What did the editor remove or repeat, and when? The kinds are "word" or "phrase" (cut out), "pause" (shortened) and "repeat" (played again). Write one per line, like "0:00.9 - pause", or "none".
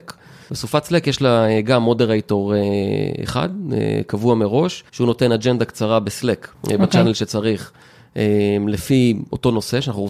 0:04.9 - pause
0:06.5 - pause